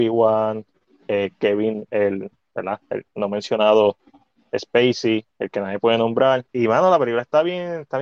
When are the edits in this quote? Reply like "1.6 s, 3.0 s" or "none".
5.3 s, 6.5 s